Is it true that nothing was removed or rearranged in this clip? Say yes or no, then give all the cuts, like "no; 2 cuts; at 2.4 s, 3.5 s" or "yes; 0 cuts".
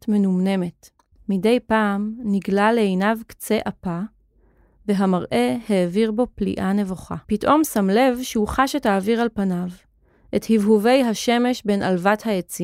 no; 2 cuts; at 1.1 s, 7.2 s